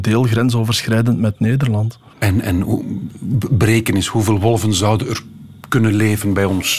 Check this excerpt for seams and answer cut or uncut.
uncut